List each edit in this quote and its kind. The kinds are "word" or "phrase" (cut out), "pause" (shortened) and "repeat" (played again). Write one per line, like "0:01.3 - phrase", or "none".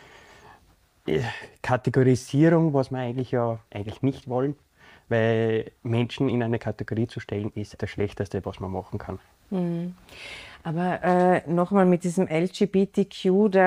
0:03.7 - pause
0:04.2 - word
0:05.8 - pause
0:07.8 - word